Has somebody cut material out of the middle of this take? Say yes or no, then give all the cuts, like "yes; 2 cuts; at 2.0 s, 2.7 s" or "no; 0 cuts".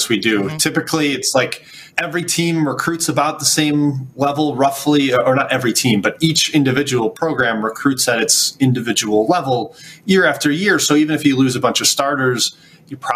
yes; 1 cut; at 1.9 s